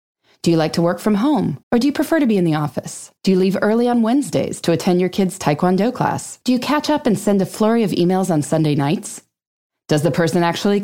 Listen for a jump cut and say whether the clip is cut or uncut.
cut